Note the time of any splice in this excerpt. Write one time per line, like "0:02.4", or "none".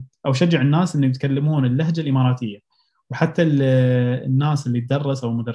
none

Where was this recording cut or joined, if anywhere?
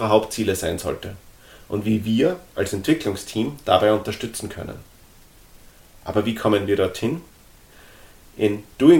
none

